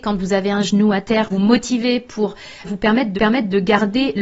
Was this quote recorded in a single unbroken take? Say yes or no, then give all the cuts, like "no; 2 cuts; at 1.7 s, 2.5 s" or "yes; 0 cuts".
no; 3 cuts; at 1.3 s, 2.6 s, 3.2 s